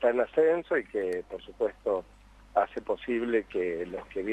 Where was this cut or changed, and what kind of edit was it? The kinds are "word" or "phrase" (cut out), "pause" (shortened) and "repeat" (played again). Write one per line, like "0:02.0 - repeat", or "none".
none

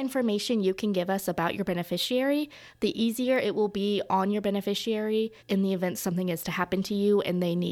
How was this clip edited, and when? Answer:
0:05.4 - pause

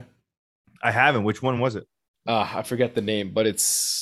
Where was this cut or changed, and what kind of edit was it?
none

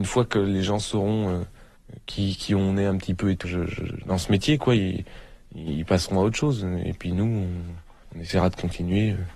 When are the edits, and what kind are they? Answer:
0:03.4 - word

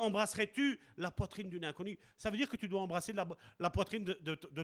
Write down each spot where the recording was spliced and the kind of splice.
none

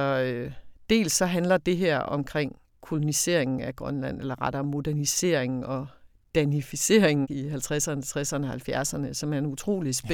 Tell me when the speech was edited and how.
none

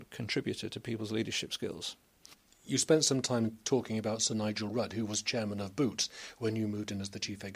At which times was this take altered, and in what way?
none

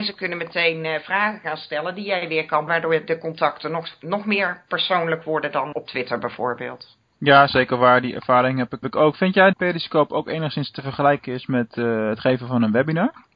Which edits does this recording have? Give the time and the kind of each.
0:02.7 - word
0:05.7 - word
0:07.1 - pause
0:08.8 - word
0:09.5 - phrase

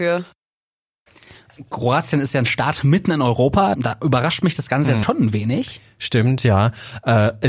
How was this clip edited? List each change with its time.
0:05.0 - word

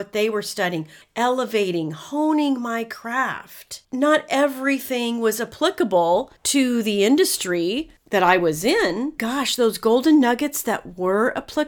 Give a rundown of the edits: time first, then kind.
0:01.0 - phrase
0:03.8 - pause
0:06.4 - pause
0:09.2 - word

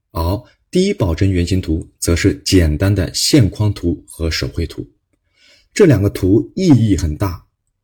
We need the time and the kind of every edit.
none

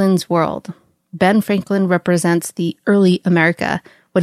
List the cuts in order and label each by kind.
none

